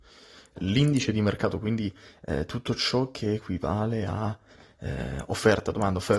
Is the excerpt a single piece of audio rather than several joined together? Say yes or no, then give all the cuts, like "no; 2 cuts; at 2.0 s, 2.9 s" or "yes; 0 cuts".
yes; 0 cuts